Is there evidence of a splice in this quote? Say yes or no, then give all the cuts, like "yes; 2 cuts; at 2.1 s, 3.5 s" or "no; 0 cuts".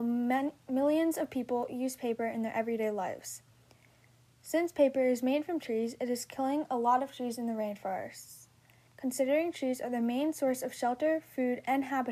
no; 0 cuts